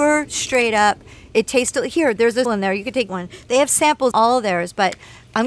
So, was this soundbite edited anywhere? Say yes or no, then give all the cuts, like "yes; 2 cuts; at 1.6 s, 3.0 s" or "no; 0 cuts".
yes; 3 cuts; at 2.4 s, 3.1 s, 4.1 s